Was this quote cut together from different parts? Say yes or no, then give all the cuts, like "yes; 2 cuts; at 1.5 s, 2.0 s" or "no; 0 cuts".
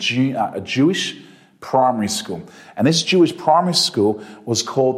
no; 0 cuts